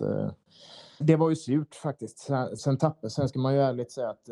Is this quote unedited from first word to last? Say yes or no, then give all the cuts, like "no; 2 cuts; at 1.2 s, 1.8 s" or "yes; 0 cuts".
no; 2 cuts; at 1.0 s, 2.6 s